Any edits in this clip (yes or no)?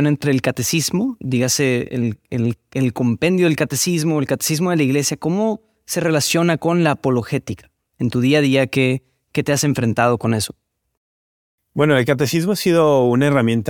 no